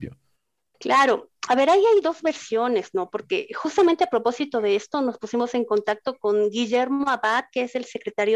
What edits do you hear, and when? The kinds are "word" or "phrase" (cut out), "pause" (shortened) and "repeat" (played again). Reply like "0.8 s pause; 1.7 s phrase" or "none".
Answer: none